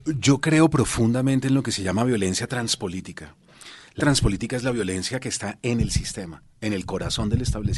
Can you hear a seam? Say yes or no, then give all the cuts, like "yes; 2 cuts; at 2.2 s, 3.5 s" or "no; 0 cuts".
yes; 1 cut; at 4.0 s